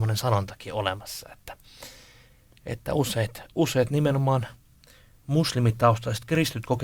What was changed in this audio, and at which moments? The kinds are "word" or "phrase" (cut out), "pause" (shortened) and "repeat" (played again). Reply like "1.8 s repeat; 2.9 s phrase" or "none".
none